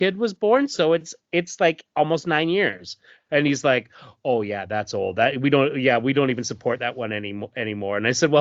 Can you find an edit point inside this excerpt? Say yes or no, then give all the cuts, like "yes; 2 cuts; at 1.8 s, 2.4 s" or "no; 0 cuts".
no; 0 cuts